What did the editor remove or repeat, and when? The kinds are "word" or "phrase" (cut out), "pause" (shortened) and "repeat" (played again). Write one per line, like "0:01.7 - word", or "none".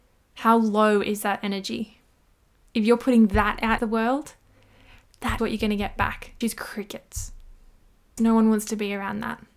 0:03.8 - word
0:05.4 - word
0:06.4 - word
0:08.2 - word